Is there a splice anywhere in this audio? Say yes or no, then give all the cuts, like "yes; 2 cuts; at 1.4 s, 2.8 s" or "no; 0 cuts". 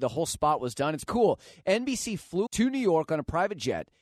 yes; 2 cuts; at 1.1 s, 2.5 s